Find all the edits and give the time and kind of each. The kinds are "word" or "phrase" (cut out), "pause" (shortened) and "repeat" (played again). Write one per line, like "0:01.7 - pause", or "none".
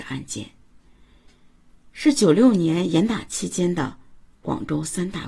none